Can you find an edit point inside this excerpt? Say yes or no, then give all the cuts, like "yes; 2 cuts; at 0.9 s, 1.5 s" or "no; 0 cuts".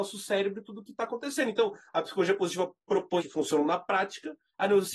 yes; 1 cut; at 3.2 s